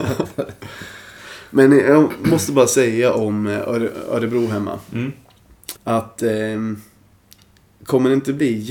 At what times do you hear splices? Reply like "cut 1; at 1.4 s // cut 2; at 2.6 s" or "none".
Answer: cut 1; at 5.8 s